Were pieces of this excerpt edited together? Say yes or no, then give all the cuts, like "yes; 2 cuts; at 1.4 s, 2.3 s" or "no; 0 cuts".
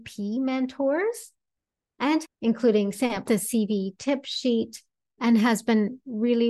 yes; 3 cuts; at 2.2 s, 3.3 s, 5.2 s